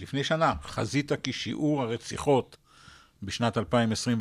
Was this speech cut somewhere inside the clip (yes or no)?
no